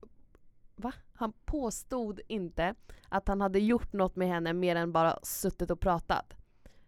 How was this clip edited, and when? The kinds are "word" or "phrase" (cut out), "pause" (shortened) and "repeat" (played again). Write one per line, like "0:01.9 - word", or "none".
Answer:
0:03.0 - pause